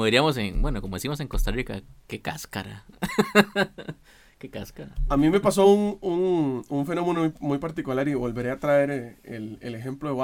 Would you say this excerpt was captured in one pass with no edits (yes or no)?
yes